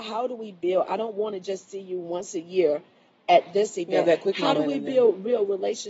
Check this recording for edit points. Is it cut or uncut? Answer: uncut